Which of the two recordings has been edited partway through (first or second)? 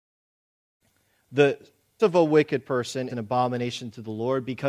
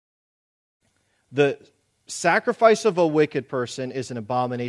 first